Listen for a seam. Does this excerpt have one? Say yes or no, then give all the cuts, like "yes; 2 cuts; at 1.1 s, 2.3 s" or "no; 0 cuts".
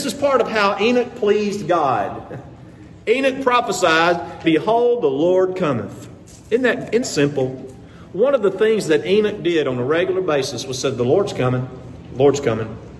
yes; 2 cuts; at 4.4 s, 7.0 s